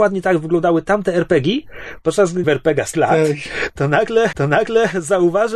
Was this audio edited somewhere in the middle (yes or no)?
yes